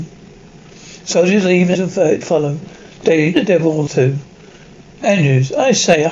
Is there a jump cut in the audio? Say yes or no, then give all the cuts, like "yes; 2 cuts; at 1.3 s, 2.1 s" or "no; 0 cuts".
yes; 4 cuts; at 1.7 s, 2.2 s, 3.3 s, 3.9 s